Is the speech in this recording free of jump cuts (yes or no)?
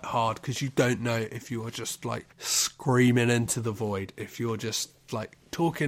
no